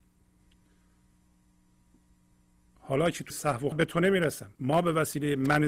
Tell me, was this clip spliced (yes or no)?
yes